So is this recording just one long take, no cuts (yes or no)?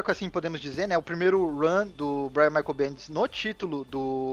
yes